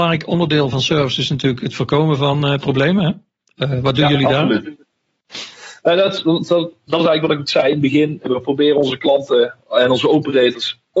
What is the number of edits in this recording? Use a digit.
0